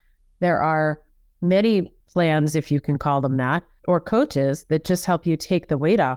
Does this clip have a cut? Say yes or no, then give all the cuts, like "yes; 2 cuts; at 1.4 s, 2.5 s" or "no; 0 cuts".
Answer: yes; 2 cuts; at 2.0 s, 3.8 s